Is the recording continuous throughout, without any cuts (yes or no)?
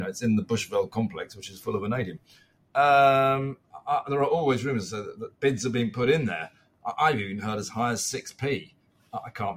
no